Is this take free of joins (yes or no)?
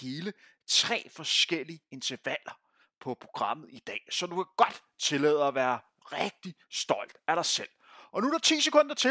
yes